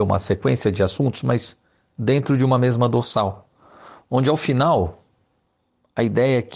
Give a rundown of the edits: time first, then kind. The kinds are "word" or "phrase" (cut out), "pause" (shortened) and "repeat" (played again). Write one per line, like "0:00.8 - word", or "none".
none